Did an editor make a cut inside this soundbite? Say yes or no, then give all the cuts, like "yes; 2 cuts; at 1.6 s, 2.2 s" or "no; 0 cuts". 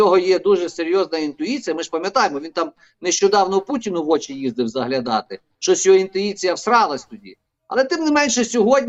no; 0 cuts